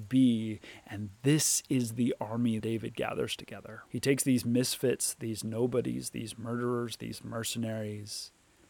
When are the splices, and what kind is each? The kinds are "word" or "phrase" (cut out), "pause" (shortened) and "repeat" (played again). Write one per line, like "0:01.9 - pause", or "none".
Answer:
0:02.6 - word
0:03.9 - pause